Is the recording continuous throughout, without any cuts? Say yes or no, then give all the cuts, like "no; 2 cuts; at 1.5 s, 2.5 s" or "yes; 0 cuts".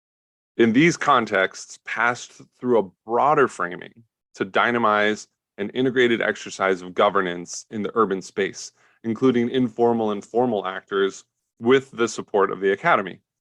yes; 0 cuts